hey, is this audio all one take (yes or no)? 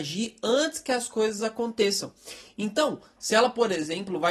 yes